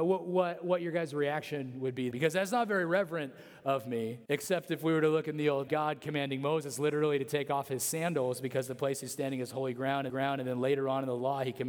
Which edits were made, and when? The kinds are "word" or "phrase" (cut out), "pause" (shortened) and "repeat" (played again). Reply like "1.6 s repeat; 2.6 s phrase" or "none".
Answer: 2.1 s word; 4.2 s pause; 5.7 s phrase; 10.1 s repeat